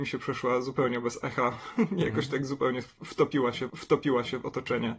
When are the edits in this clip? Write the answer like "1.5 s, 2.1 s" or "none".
3.7 s